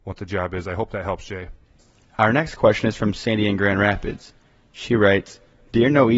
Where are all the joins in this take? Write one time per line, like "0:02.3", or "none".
none